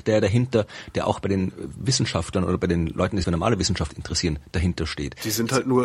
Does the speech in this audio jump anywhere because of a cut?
yes; 1 cut; at 3.2 s

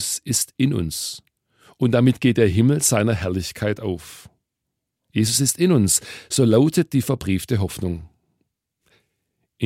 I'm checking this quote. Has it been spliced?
no; 0 cuts

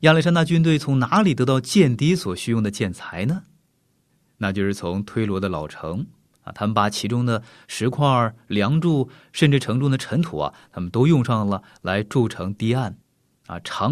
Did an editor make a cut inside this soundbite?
no; 0 cuts

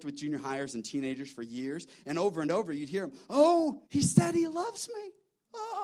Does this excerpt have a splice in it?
yes; 1 cut; at 3.9 s

